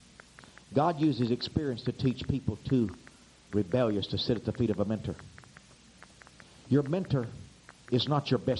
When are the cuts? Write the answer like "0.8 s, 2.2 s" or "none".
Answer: none